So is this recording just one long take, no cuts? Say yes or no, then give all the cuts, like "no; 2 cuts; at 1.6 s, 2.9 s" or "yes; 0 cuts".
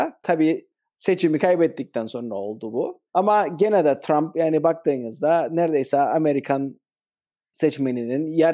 no; 1 cut; at 3.1 s